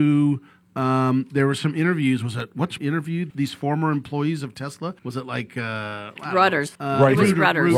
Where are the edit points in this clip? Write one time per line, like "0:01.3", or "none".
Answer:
0:02.8
0:03.3
0:05.0
0:06.8